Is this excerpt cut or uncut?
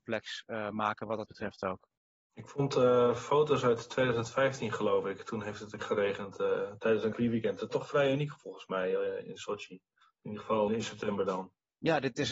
cut